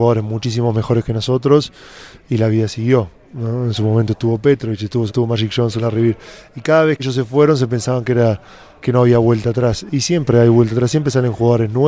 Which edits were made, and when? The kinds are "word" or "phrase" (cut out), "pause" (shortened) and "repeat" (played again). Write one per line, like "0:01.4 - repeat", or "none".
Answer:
0:05.1 - phrase
0:07.0 - word
0:08.8 - word